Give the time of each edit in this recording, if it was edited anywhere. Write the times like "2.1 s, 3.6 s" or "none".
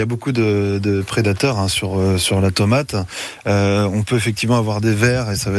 none